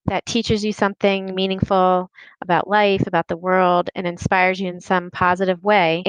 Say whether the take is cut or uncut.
uncut